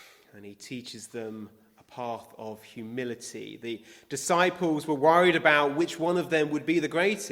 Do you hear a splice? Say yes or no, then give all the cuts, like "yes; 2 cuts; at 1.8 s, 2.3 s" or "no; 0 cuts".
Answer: no; 0 cuts